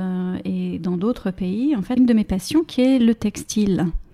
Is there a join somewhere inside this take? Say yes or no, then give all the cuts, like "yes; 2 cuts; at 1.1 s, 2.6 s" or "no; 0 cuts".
yes; 1 cut; at 2.0 s